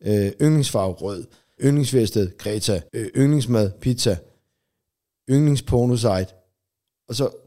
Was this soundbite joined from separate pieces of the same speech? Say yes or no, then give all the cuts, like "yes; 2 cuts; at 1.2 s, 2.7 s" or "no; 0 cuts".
yes; 2 cuts; at 1.6 s, 2.9 s